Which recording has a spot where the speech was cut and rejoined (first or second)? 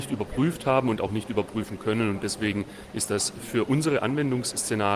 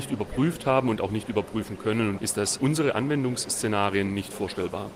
second